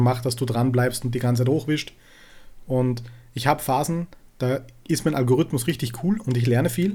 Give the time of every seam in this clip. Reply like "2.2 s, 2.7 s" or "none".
none